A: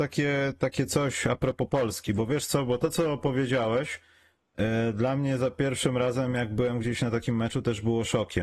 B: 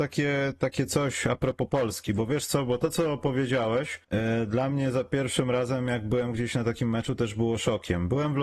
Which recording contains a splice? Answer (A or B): B